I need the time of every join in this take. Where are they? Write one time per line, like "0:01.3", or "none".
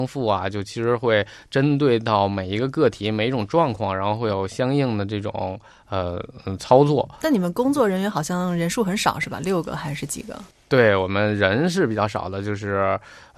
none